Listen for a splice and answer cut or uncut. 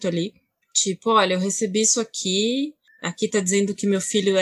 uncut